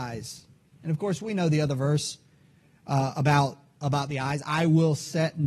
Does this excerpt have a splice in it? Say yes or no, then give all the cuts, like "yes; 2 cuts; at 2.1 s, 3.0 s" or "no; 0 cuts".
no; 0 cuts